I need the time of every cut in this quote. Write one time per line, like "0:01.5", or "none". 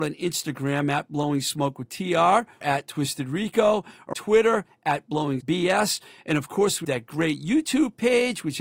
0:02.6
0:04.1
0:05.4
0:06.8